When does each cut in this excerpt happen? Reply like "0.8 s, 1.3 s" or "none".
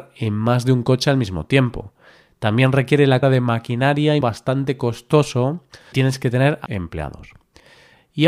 3.2 s, 4.2 s, 5.9 s, 6.7 s